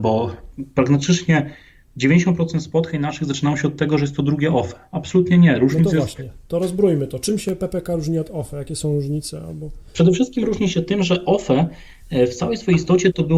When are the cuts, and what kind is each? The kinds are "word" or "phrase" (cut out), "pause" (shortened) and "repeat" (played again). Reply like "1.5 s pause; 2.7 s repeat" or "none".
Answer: 9.9 s pause